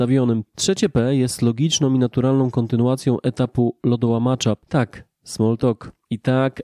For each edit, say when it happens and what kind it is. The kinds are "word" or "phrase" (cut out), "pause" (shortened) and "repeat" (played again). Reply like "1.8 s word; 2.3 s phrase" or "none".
none